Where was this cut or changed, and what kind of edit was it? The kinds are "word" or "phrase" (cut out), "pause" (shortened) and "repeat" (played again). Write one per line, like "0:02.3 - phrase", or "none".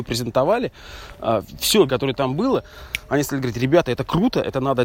0:01.9 - word